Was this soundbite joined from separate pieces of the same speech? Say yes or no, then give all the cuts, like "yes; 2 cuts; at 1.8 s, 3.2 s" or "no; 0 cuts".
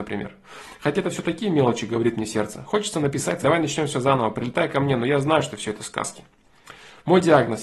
yes; 1 cut; at 3.4 s